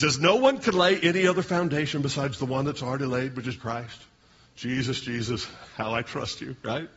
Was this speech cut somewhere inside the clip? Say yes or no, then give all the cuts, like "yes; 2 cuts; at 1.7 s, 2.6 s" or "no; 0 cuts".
yes; 1 cut; at 3.6 s